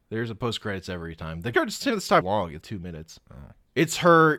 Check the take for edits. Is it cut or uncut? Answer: cut